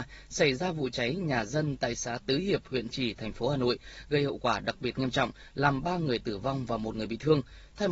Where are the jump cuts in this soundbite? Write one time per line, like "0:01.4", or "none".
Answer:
0:02.9

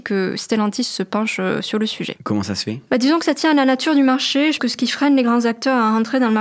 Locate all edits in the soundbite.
0:04.6

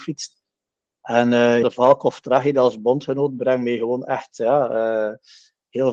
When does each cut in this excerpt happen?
0:01.6

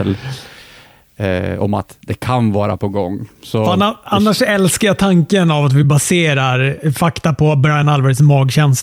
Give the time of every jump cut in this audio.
none

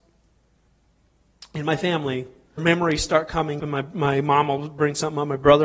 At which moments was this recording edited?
0:02.6
0:03.6

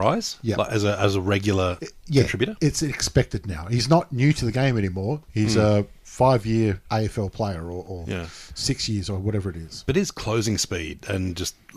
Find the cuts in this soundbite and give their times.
none

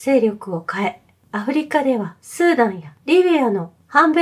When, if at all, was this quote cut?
none

